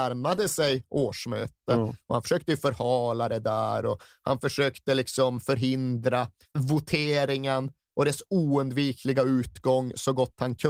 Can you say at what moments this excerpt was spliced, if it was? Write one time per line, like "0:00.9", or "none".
0:06.4